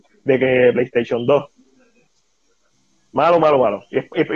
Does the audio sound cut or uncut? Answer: uncut